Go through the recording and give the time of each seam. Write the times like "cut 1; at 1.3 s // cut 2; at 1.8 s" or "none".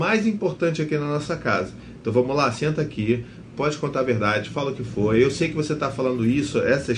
none